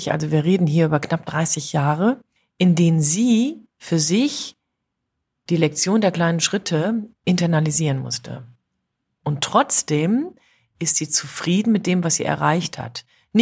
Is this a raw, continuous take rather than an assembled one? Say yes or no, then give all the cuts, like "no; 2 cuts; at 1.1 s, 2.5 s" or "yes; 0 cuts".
no; 3 cuts; at 2.4 s, 3.7 s, 7.1 s